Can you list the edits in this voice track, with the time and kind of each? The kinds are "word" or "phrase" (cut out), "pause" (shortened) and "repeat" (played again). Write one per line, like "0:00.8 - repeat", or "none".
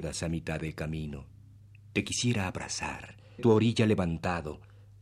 0:01.6 - pause
0:03.4 - word